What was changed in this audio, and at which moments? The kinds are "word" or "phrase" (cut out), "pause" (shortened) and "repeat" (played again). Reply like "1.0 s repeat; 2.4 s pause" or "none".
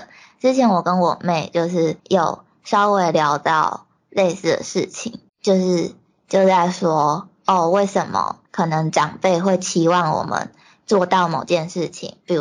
2.0 s pause; 5.3 s pause; 8.5 s pause